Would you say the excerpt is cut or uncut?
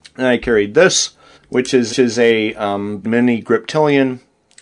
cut